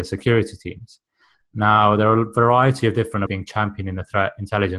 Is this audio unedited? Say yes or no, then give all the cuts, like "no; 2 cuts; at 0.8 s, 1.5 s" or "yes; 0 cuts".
no; 1 cut; at 3.3 s